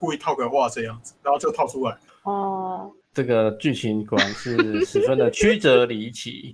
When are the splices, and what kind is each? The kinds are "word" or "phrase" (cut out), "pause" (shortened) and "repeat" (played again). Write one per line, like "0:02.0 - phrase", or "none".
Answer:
0:01.2 - pause
0:02.1 - word